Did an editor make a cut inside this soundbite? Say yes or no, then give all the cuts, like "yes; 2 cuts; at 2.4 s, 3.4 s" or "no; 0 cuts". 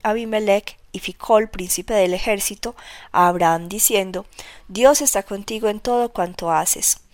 no; 0 cuts